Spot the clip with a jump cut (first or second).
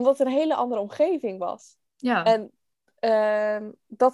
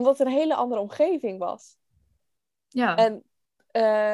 first